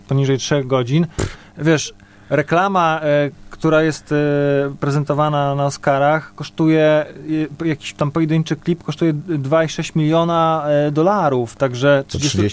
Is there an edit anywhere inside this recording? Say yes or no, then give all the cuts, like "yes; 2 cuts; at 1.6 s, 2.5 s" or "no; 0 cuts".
no; 0 cuts